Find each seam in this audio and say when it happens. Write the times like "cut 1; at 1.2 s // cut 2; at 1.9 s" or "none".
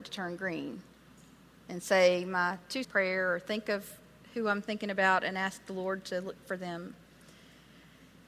cut 1; at 2.8 s